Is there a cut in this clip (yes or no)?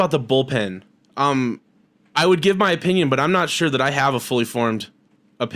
no